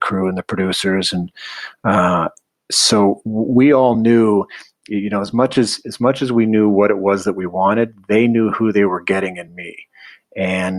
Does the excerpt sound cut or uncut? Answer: uncut